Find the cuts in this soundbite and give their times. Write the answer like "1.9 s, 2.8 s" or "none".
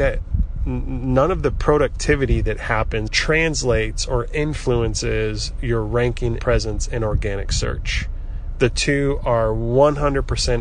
3.1 s, 6.4 s